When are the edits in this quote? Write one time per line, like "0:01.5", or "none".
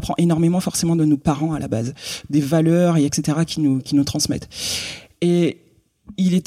none